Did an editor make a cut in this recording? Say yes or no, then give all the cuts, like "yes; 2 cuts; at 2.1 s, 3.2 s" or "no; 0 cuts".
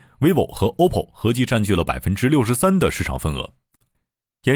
no; 0 cuts